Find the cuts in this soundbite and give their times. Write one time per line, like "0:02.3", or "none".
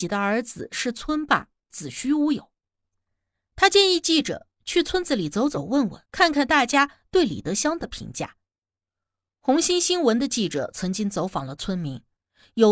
0:06.1